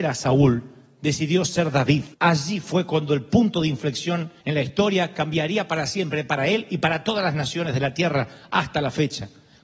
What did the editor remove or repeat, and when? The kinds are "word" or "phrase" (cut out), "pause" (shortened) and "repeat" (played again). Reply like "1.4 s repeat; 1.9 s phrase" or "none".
2.1 s pause; 4.4 s pause